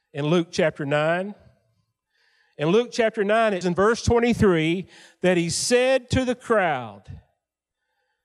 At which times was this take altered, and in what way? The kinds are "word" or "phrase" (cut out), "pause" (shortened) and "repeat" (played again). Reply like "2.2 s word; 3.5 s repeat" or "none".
3.6 s word